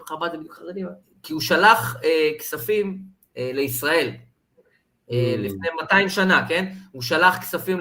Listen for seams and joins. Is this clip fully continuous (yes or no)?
no